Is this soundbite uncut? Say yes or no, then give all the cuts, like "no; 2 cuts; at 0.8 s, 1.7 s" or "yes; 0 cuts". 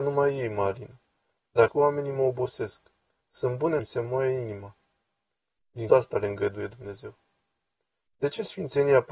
no; 3 cuts; at 1.7 s, 3.8 s, 5.9 s